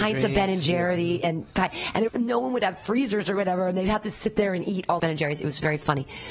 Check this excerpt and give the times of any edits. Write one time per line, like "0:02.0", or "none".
0:02.1
0:05.0

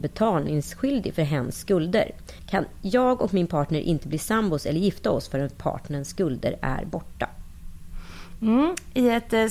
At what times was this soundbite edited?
none

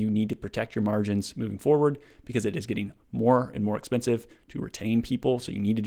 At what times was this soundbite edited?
none

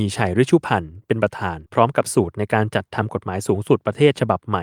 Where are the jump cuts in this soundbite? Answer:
0:01.7

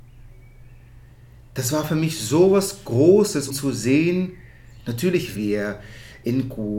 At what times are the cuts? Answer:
0:03.5
0:05.4

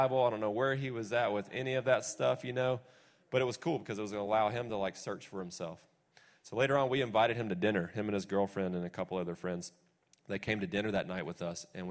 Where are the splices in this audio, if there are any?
none

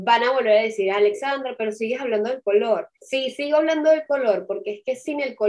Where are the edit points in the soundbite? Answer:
0:02.9

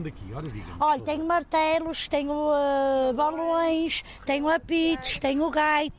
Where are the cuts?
none

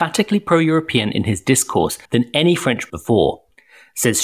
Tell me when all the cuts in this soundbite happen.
0:02.1
0:02.9

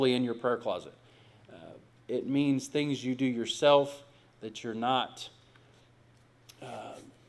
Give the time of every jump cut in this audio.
none

